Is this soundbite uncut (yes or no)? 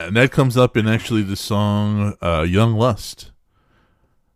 yes